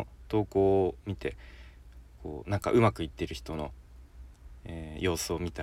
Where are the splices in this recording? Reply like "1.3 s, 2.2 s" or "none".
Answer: none